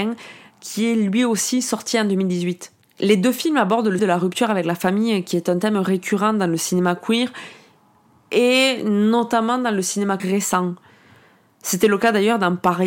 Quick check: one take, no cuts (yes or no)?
no